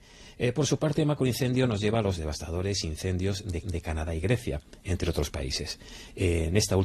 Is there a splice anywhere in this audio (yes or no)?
yes